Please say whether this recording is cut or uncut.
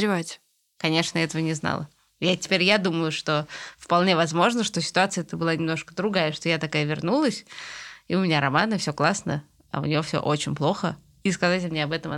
uncut